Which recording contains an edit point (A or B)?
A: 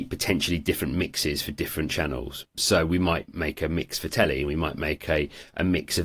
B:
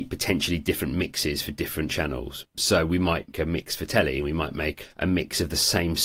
B